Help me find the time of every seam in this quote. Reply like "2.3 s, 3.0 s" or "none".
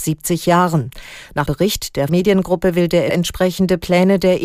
1.5 s, 2.1 s, 3.1 s